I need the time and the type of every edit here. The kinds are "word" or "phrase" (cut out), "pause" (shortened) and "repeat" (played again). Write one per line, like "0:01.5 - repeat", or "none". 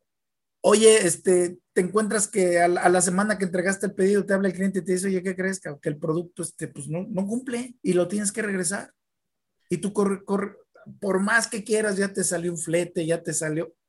0:01.7 - pause
0:07.8 - pause